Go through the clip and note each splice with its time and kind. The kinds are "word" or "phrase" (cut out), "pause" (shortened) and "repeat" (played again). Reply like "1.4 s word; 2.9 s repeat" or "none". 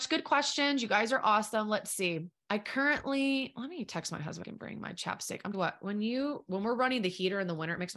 2.4 s pause; 4.4 s phrase; 5.5 s word